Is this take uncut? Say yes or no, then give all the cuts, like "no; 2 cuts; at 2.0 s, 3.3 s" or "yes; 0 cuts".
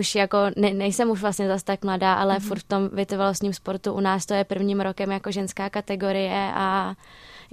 yes; 0 cuts